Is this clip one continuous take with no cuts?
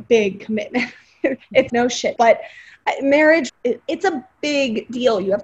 no; 3 cuts; at 1.7 s, 2.2 s, 3.5 s

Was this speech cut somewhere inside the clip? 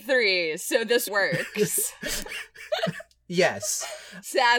yes; 1 cut; at 1.1 s

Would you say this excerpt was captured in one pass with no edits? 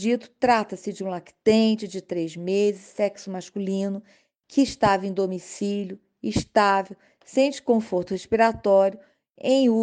yes; 0 cuts

